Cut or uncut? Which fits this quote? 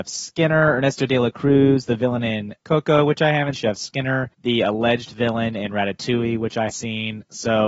cut